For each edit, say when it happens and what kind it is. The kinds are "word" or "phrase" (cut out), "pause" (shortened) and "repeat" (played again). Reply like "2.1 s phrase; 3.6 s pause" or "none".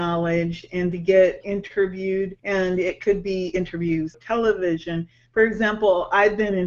2.4 s pause; 4.1 s phrase